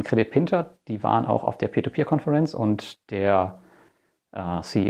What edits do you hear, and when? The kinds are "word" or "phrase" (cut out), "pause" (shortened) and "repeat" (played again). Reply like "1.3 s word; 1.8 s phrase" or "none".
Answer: none